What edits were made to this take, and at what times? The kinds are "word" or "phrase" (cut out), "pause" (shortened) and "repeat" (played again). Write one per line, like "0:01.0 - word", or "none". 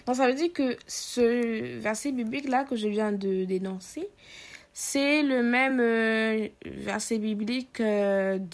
none